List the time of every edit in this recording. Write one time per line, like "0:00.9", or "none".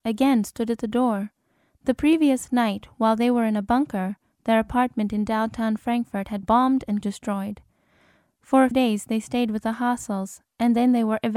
0:06.4
0:07.0
0:08.7